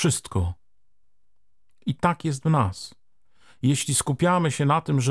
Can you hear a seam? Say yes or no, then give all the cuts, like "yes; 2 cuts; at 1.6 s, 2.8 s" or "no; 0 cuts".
no; 0 cuts